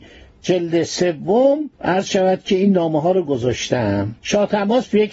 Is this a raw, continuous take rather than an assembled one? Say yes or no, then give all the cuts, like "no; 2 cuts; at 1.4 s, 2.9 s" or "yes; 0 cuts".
no; 2 cuts; at 1.7 s, 4.2 s